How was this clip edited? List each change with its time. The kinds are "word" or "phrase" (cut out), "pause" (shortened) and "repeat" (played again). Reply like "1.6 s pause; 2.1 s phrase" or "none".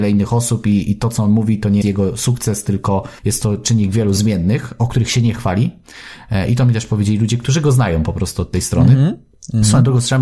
1.8 s word; 3.2 s pause

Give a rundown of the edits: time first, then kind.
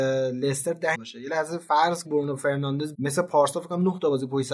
0.9 s word; 2.0 s phrase; 2.9 s word

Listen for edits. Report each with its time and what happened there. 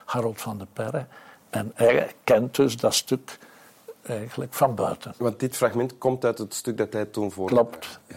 none

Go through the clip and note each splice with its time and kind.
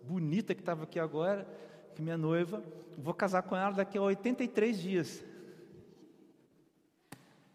none

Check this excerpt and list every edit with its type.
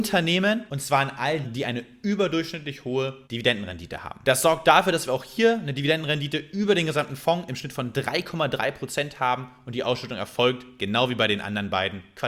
1.4 s word; 3.2 s pause

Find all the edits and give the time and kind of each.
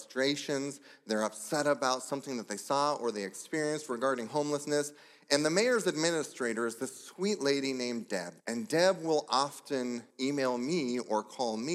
8.4 s pause; 10.1 s pause

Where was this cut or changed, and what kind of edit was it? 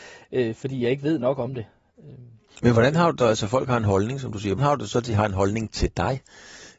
3.2 s word; 4.6 s word

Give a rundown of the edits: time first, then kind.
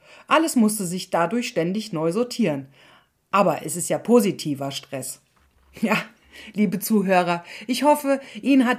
none

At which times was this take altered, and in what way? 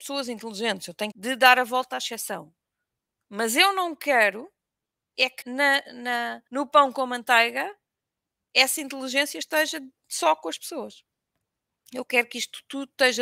1.1 s phrase; 5.4 s word; 6.5 s pause

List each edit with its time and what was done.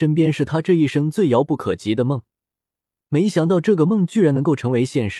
none

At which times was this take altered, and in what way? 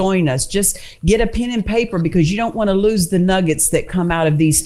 none

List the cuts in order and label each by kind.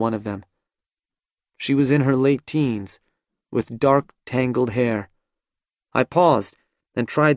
none

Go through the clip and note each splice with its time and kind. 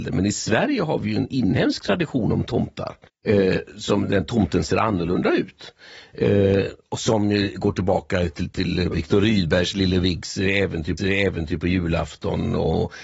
3.1 s pause; 8.9 s word; 11.0 s repeat

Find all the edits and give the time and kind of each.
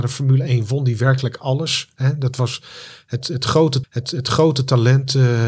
3.8 s repeat

